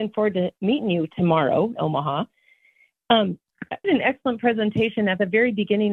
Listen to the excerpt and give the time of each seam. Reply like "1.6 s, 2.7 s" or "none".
1.8 s, 3.8 s